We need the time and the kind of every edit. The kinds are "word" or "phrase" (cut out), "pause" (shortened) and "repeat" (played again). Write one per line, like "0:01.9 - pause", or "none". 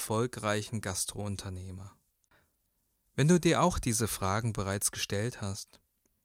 none